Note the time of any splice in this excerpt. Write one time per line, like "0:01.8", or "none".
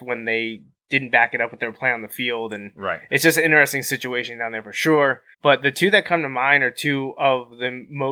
0:05.3